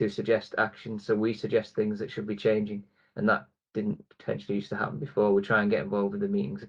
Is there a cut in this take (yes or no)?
no